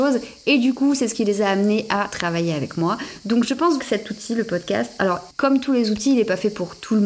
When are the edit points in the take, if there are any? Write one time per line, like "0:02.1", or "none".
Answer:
0:03.8
0:05.3